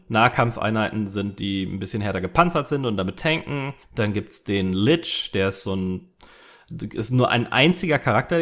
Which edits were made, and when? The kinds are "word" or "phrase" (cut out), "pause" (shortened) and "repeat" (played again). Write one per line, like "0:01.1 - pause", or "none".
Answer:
0:03.8 - pause